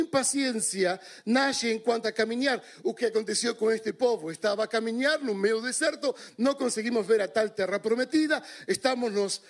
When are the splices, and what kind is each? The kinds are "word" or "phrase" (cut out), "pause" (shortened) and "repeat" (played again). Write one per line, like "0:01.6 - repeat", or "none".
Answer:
0:02.0 - word